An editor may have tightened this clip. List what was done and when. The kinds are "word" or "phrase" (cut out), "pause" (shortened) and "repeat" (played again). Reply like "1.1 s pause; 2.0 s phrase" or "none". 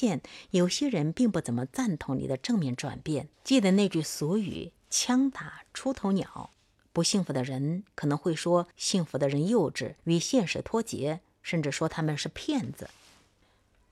3.3 s pause; 6.5 s pause; 8.7 s pause; 10.0 s pause